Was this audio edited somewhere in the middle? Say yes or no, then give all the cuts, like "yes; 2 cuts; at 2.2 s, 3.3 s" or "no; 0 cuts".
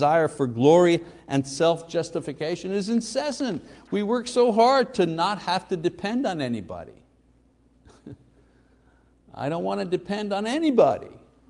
no; 0 cuts